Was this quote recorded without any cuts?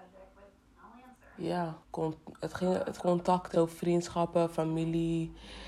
no; 3 cuts; at 1.8 s, 3.0 s, 3.5 s

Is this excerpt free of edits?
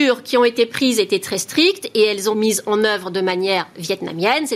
no; 1 cut; at 2.3 s

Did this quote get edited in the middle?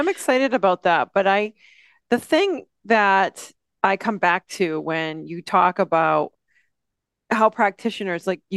no; 0 cuts

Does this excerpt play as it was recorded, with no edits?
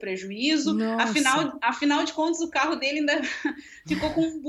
yes; 0 cuts

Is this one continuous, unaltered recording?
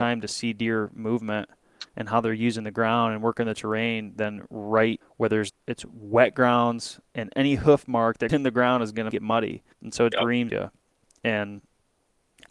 no; 9 cuts; at 1.9 s, 5.0 s, 5.5 s, 7.1 s, 8.3 s, 9.1 s, 9.7 s, 10.1 s, 10.5 s

